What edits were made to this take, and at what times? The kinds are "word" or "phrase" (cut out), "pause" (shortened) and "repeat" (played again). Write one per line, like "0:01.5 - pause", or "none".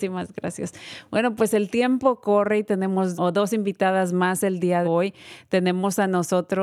0:03.1 - word
0:04.8 - word